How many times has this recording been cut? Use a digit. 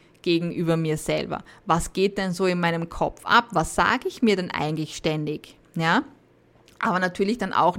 0